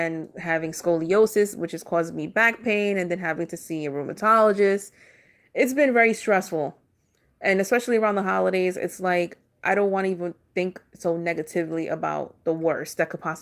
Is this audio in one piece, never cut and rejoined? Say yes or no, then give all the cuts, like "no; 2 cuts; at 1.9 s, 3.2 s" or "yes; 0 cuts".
yes; 0 cuts